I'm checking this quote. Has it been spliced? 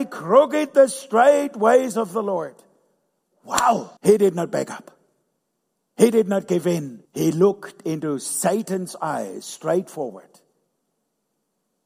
yes; 2 cuts; at 4.0 s, 7.0 s

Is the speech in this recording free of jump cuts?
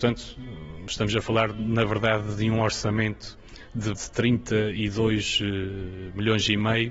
no; 1 cut; at 4.0 s

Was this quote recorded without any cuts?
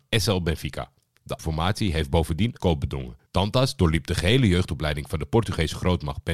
no; 3 cuts; at 1.4 s, 2.6 s, 3.3 s

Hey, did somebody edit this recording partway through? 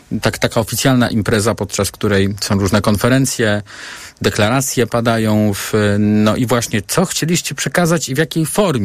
no; 0 cuts

